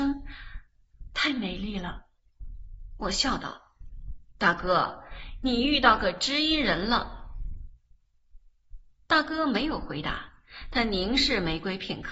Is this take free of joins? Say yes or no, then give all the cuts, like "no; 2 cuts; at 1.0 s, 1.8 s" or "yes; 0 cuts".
yes; 0 cuts